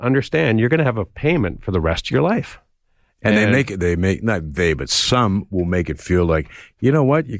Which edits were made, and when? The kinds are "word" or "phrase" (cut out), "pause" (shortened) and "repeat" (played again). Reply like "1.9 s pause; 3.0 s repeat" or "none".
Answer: none